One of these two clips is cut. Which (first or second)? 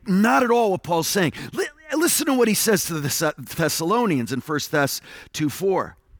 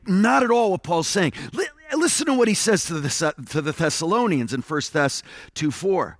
first